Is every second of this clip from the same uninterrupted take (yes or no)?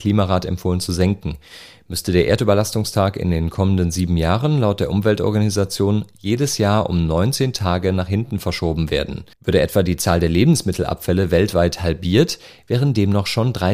no